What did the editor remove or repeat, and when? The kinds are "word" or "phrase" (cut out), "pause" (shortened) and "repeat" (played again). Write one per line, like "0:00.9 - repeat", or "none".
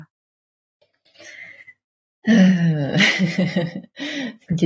none